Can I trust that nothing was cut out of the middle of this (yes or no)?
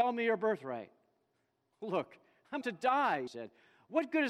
no